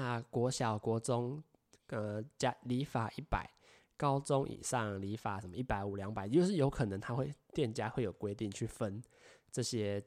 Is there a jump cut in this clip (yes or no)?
no